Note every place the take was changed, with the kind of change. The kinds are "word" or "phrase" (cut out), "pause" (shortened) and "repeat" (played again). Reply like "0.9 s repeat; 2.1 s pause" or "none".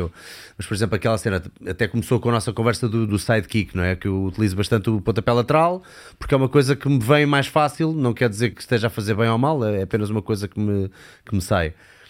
3.1 s word; 8.5 s word